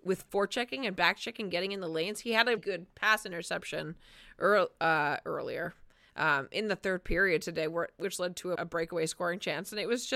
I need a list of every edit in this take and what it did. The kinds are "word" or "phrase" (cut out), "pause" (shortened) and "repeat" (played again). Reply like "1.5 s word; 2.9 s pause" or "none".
2.6 s word; 8.6 s word